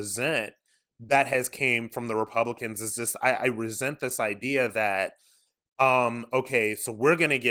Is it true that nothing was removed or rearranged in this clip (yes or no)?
yes